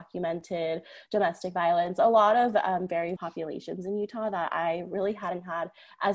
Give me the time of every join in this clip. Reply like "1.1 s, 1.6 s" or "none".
3.2 s